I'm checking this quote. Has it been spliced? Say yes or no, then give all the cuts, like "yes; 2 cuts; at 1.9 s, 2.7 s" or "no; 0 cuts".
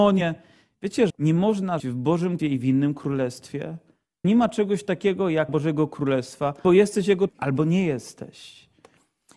yes; 7 cuts; at 1.1 s, 1.8 s, 2.4 s, 4.2 s, 5.5 s, 6.6 s, 7.3 s